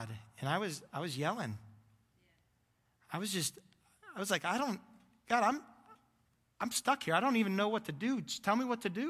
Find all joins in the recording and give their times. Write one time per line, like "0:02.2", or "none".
none

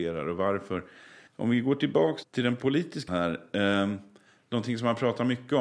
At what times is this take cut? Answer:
0:01.3
0:02.2
0:03.1

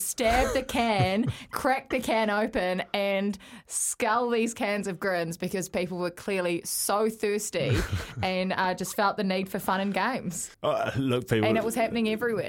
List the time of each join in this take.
0:10.5

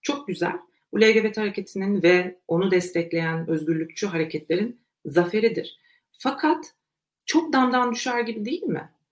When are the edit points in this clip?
none

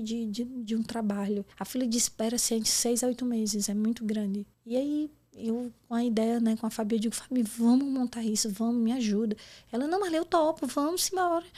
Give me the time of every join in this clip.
0:01.5
0:04.5

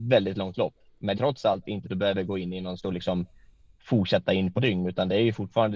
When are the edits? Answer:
0:01.1
0:01.8
0:02.8
0:04.6

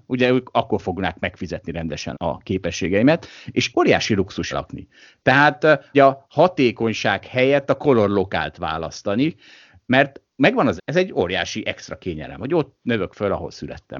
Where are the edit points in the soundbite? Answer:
0:02.1
0:03.7
0:04.5
0:05.9
0:10.8

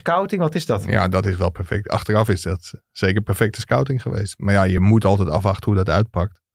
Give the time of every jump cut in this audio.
none

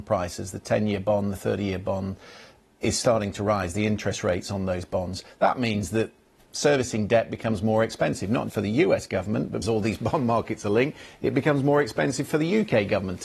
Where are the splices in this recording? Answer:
0:08.5
0:09.6

